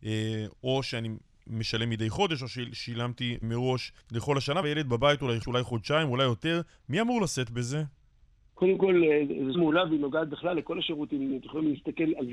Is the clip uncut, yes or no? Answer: no